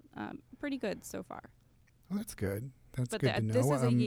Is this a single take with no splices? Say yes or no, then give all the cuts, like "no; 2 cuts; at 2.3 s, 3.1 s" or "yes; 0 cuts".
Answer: no; 1 cut; at 1.7 s